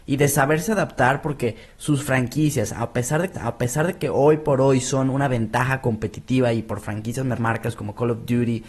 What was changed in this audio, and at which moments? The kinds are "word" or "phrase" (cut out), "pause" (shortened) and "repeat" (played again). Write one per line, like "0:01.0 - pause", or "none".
0:03.3 - repeat
0:07.4 - phrase